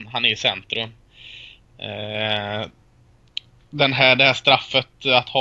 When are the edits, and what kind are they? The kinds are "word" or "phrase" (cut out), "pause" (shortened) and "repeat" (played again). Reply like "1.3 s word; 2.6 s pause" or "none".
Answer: none